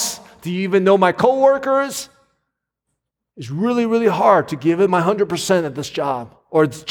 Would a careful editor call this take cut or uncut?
uncut